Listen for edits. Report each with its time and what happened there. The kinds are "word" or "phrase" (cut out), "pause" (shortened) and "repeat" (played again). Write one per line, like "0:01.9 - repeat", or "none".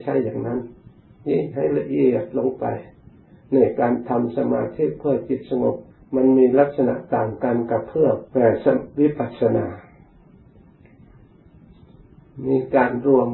0:05.9 - pause
0:08.3 - pause